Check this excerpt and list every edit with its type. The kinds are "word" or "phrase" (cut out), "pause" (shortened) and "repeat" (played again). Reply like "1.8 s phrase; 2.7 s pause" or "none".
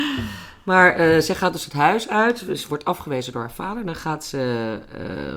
none